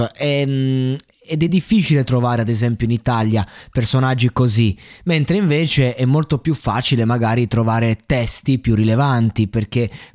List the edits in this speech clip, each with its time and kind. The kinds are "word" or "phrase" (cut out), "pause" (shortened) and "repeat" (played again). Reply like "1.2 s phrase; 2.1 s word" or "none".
none